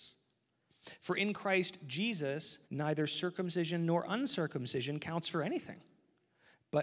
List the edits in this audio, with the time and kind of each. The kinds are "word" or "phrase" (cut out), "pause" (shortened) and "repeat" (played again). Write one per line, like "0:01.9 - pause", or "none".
0:02.6 - pause